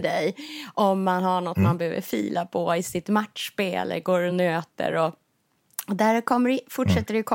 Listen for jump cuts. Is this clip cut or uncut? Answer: uncut